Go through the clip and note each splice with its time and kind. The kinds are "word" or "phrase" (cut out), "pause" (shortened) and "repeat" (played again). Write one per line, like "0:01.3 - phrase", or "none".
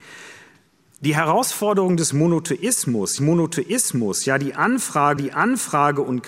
0:03.2 - repeat
0:05.2 - repeat